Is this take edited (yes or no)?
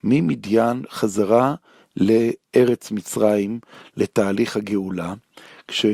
no